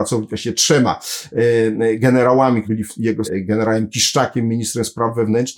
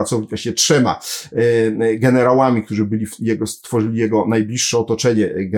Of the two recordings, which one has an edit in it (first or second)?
first